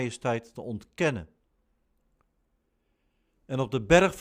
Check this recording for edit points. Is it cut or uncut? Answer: uncut